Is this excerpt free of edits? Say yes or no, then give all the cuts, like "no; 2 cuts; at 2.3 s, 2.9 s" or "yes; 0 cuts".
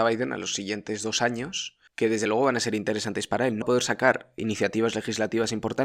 no; 3 cuts; at 1.9 s, 3.6 s, 4.4 s